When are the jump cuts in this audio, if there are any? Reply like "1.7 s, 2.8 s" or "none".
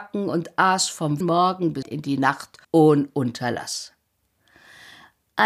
1.2 s, 1.8 s, 2.6 s